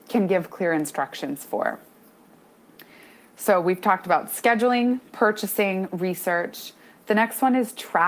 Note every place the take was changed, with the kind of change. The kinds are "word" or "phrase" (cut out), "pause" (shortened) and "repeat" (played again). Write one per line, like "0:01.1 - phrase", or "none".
none